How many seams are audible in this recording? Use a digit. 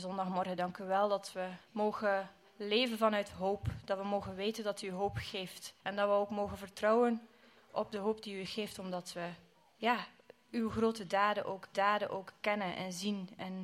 4